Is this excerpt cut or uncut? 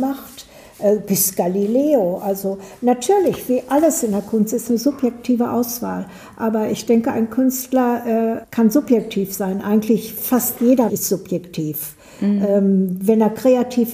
cut